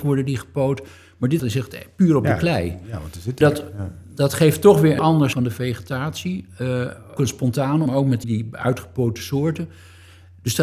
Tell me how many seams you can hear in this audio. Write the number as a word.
seven